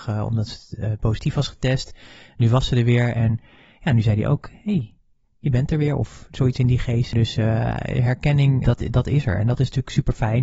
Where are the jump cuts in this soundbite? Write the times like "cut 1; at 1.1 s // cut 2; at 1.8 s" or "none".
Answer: none